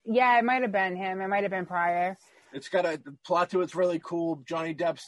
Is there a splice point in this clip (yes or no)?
no